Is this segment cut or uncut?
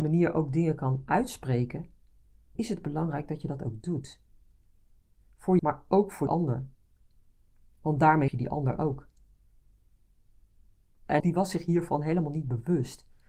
cut